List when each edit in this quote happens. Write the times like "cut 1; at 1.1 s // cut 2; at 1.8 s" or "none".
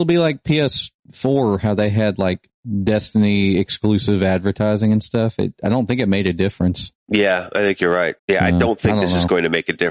cut 1; at 7.0 s // cut 2; at 8.2 s